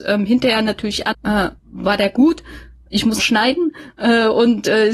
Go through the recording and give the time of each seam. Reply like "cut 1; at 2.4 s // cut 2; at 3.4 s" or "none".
cut 1; at 1.1 s // cut 2; at 1.6 s // cut 3; at 3.2 s